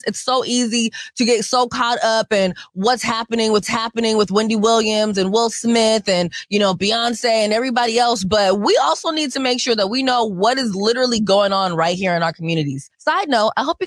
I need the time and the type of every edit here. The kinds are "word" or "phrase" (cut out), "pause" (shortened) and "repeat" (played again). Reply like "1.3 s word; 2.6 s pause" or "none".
3.6 s repeat; 12.9 s pause

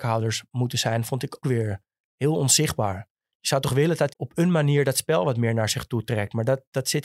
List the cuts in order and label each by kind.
1.4 s word; 4.1 s word

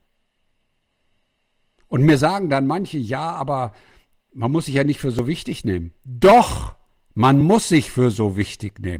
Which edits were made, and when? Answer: none

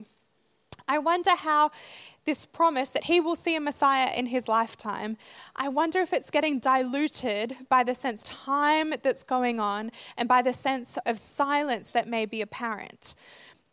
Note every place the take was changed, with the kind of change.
8.2 s word; 11.0 s word

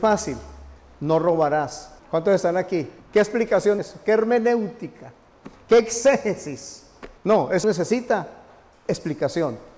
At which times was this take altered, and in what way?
2.0 s pause; 3.0 s pause; 3.8 s word; 7.2 s pause; 7.6 s word

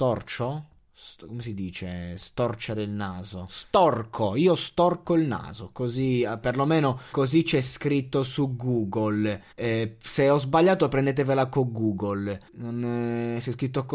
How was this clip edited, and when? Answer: 7.1 s word; 9.5 s pause; 12.5 s pause

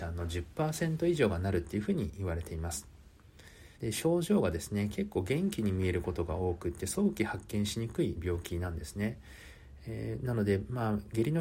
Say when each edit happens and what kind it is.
3.7 s pause

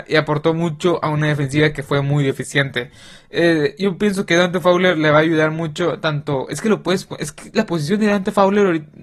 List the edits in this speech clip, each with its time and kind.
none

